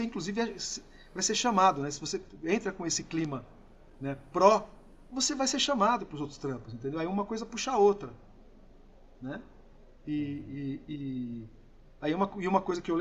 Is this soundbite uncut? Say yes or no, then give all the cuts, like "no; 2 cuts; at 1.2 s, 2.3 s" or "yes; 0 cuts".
yes; 0 cuts